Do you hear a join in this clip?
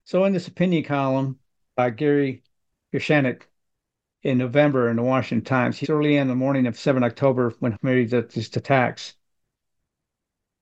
yes; 2 cuts; at 5.8 s, 7.7 s

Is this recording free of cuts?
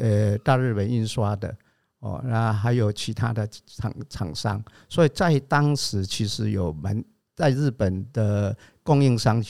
yes; 0 cuts

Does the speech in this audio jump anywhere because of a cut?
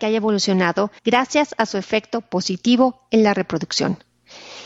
yes; 1 cut; at 1.0 s

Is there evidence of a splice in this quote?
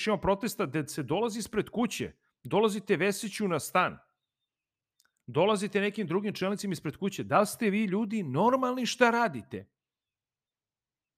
no; 0 cuts

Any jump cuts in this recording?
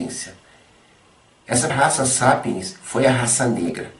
yes; 1 cut; at 1.7 s

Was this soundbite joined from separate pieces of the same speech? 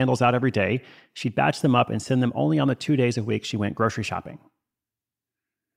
no; 0 cuts

